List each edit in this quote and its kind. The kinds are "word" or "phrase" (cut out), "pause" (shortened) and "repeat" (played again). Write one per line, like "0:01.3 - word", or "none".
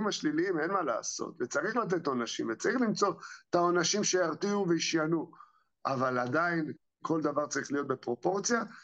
none